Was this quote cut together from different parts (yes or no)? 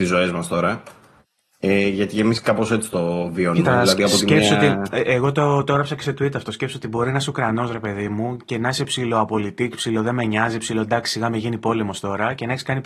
no